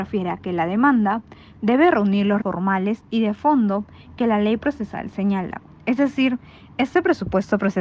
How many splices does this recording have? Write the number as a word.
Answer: one